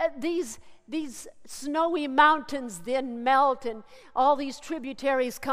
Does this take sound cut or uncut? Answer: uncut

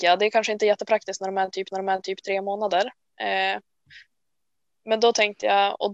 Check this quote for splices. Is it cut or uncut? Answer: cut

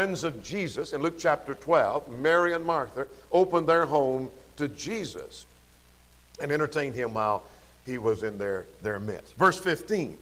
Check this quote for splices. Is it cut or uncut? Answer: uncut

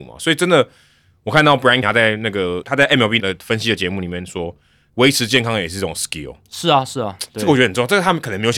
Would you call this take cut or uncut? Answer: cut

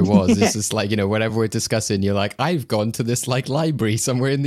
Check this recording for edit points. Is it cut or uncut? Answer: uncut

